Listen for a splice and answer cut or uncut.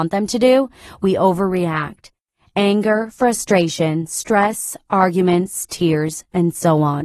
uncut